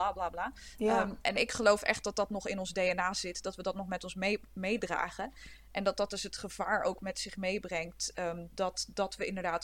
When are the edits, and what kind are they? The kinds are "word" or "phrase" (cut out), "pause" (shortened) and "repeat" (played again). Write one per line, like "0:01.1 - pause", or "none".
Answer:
0:01.2 - word